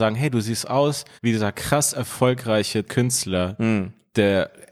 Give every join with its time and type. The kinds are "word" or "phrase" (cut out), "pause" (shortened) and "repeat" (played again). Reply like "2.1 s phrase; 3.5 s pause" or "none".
1.2 s pause; 2.8 s word